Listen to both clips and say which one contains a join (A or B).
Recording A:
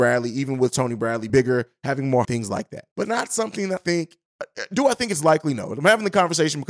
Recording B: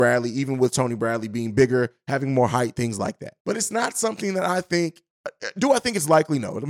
A